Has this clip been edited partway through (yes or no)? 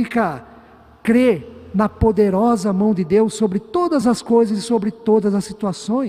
no